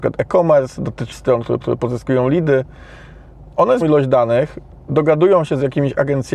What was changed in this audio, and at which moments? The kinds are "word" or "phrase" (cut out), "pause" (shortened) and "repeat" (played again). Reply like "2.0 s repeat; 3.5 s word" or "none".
1.1 s word; 1.6 s repeat; 3.8 s phrase